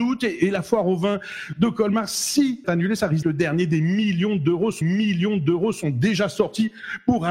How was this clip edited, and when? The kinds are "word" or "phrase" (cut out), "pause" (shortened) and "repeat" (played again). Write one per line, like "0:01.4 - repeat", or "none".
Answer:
0:02.6 - phrase
0:03.2 - word
0:04.8 - repeat